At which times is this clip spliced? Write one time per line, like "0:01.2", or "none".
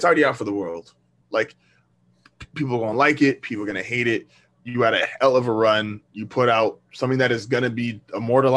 none

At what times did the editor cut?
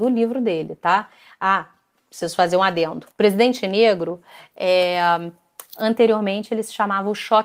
0:03.1

